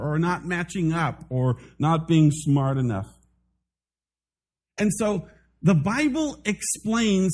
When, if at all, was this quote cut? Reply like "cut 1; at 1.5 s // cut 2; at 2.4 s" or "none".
none